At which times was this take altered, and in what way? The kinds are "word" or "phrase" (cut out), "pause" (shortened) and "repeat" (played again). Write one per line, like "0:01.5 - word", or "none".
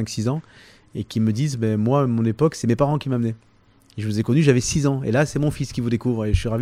none